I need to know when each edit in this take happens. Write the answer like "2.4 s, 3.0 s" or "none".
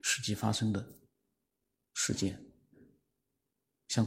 none

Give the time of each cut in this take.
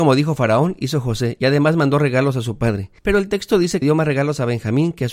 3.0 s, 3.8 s

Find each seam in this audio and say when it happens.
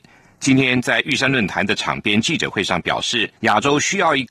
3.4 s

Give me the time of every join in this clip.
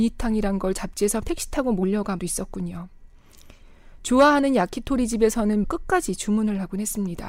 1.2 s, 2.2 s, 5.6 s

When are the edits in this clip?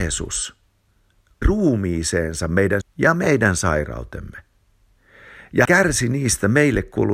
1.4 s, 2.8 s, 5.6 s

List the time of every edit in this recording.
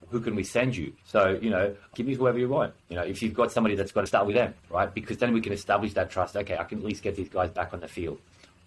1.0 s, 1.9 s, 4.1 s

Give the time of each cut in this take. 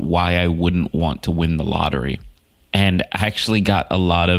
2.5 s

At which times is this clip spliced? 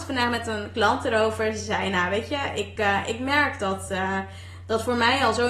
none

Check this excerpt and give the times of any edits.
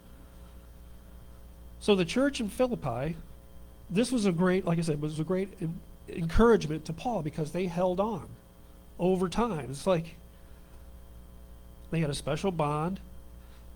none

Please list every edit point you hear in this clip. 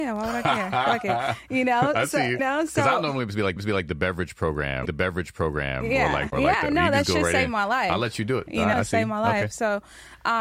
2.4 s, 3.6 s, 4.9 s, 6.3 s, 8.7 s

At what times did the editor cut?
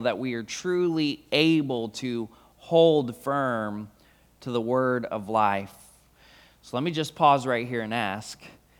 none

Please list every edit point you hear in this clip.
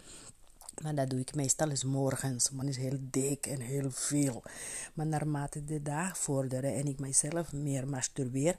2.6 s

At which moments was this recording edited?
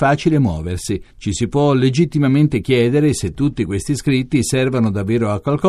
none

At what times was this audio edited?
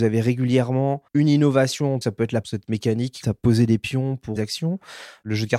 1.1 s, 2.0 s, 2.4 s, 3.2 s, 4.4 s

